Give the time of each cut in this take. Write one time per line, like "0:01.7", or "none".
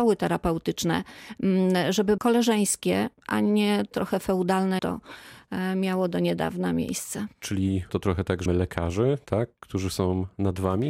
0:02.2
0:03.9
0:04.8
0:07.9
0:08.5